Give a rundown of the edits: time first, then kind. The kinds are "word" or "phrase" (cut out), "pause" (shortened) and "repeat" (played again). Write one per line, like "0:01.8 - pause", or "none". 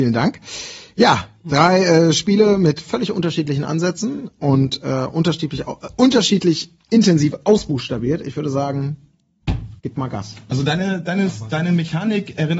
0:09.8 - pause